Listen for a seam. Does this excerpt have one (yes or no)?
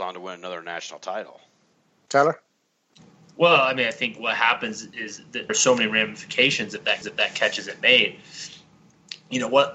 yes